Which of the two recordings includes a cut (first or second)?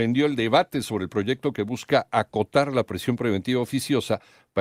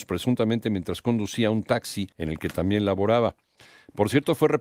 second